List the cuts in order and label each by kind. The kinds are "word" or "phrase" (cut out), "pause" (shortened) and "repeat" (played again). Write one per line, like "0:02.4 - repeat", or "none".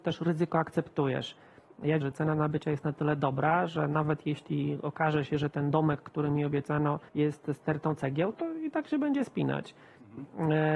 0:02.0 - word
0:07.1 - pause